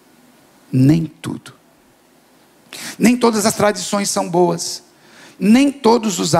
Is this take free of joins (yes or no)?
yes